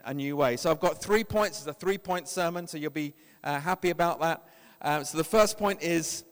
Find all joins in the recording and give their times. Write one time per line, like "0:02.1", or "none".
none